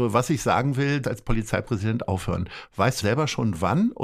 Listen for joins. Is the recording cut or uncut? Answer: cut